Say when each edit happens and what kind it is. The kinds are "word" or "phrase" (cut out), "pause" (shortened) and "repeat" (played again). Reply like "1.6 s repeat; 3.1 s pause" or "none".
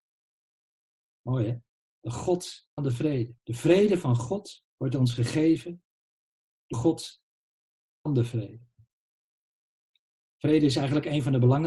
1.8 s pause; 2.8 s word; 3.4 s pause; 4.7 s pause; 6.7 s word; 8.1 s word